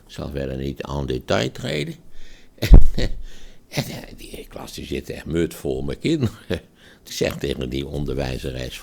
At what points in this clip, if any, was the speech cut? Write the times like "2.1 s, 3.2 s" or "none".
7.1 s